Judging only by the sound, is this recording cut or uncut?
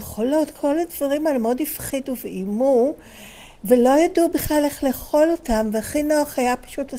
uncut